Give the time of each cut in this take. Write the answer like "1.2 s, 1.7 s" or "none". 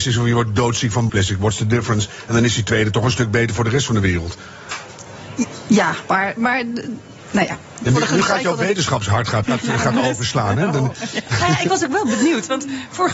1.1 s, 9.4 s